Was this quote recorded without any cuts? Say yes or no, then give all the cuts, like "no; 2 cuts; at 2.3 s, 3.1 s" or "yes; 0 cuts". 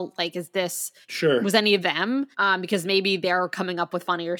no; 3 cuts; at 1.0 s, 1.8 s, 2.3 s